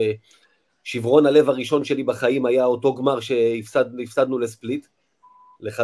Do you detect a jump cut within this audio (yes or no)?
no